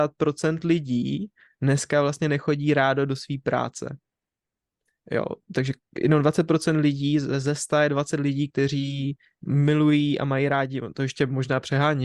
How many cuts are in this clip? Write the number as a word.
zero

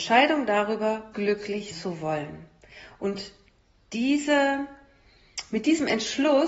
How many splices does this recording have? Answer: two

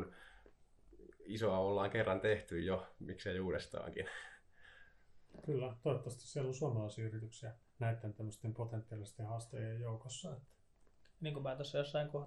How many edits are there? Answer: two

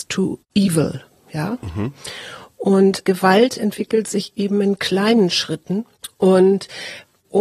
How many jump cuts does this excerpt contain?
one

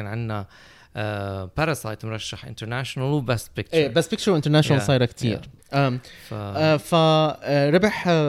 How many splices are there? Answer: zero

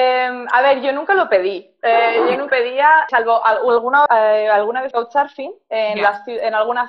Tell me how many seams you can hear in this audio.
four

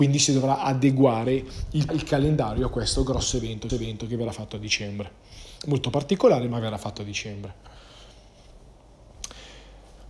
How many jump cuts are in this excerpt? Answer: three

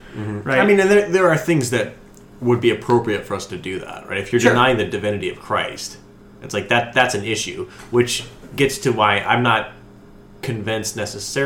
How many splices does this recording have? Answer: zero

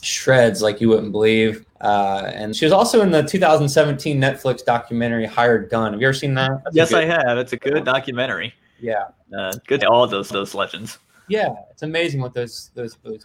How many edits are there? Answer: five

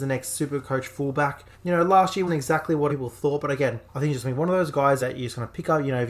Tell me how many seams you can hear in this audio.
five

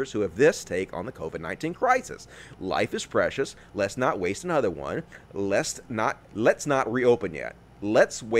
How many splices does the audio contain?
one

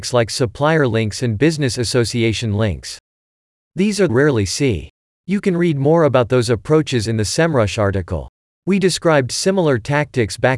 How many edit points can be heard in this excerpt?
one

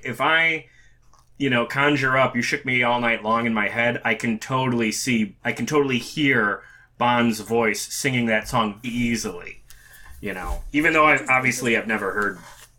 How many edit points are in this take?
two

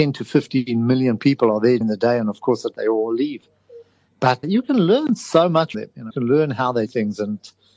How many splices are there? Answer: six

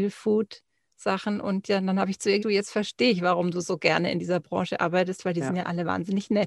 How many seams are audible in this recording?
one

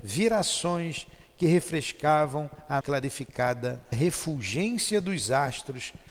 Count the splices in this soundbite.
two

